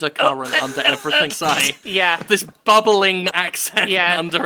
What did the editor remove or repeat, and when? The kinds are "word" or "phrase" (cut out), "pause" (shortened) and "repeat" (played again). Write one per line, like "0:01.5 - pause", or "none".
0:01.3 - word
0:02.3 - word
0:03.3 - word